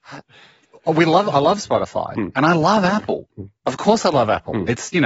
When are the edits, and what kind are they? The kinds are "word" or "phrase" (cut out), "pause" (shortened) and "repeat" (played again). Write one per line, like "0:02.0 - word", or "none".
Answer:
none